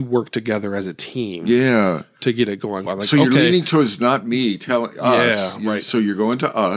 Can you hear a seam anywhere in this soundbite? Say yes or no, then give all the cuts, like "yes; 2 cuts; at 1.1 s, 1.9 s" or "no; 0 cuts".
yes; 1 cut; at 2.9 s